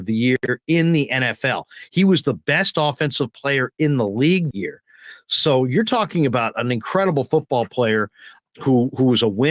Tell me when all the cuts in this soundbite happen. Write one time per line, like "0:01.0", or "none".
0:04.5
0:08.4